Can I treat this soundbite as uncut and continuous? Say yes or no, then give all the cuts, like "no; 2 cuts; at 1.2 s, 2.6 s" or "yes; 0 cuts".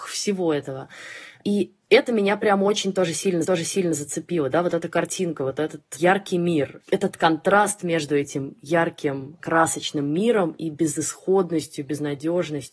no; 2 cuts; at 3.4 s, 6.8 s